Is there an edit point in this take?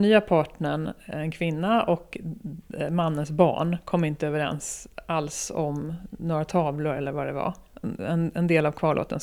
no; 0 cuts

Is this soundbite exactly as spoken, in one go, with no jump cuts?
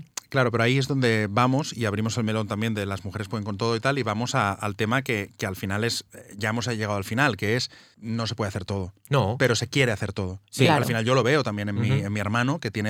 yes; 0 cuts

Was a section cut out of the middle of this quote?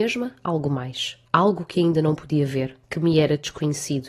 yes; 2 cuts; at 1.2 s, 2.8 s

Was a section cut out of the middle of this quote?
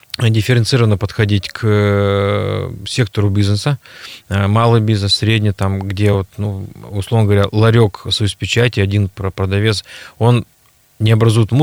no; 0 cuts

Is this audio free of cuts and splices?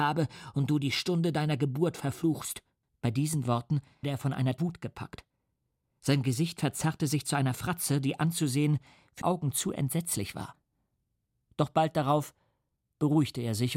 no; 4 cuts; at 2.9 s, 4.0 s, 4.6 s, 9.2 s

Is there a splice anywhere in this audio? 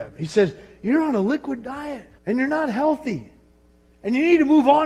yes; 1 cut; at 2.2 s

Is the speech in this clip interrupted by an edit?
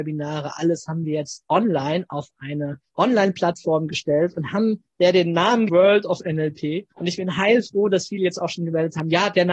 yes; 3 cuts; at 2.9 s, 5.7 s, 6.9 s

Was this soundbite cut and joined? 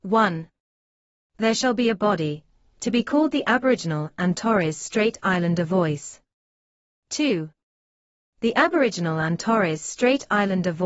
no; 0 cuts

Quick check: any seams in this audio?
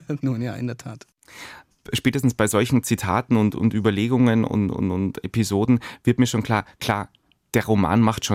no; 0 cuts

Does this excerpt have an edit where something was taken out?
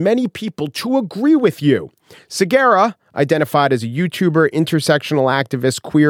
no; 0 cuts

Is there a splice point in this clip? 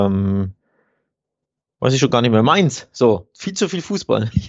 no; 0 cuts

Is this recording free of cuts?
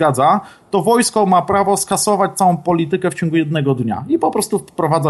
yes; 0 cuts

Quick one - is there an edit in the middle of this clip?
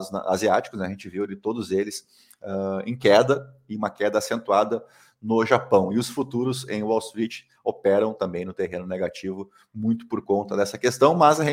no; 0 cuts

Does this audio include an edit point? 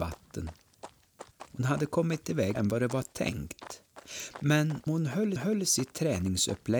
yes; 4 cuts; at 1.3 s, 2.5 s, 4.9 s, 5.4 s

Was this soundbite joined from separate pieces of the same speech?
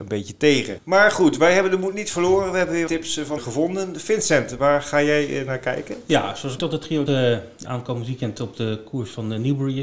yes; 5 cuts; at 2.9 s, 3.4 s, 6.6 s, 7.1 s, 7.6 s

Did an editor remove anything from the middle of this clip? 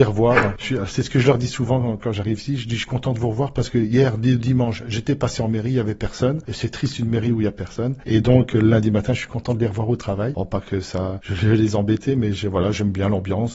no; 0 cuts

